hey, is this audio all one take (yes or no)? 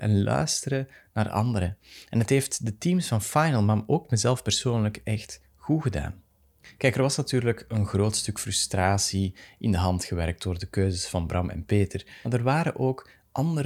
yes